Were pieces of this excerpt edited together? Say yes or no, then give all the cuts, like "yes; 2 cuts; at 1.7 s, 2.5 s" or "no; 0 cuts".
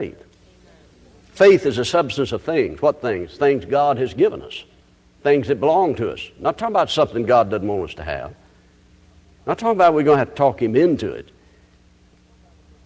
no; 0 cuts